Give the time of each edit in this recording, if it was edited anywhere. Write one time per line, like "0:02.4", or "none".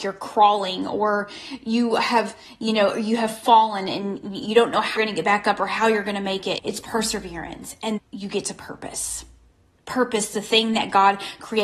0:05.0
0:06.6
0:08.0